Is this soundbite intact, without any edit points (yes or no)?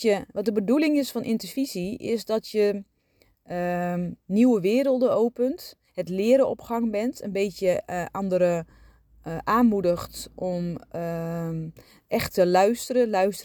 yes